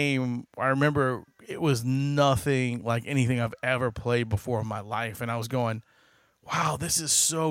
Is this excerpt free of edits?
yes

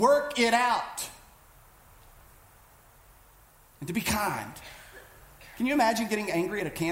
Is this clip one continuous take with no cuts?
yes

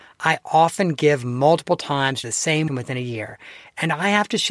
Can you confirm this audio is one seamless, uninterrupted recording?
no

